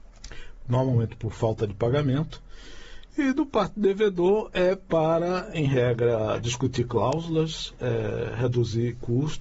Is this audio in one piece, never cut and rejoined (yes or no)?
yes